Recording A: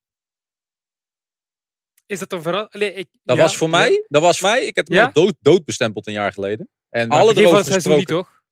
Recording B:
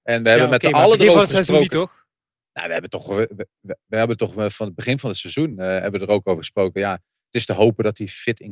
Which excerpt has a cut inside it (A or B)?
A